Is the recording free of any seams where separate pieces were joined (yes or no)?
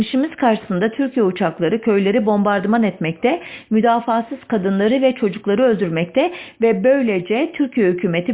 yes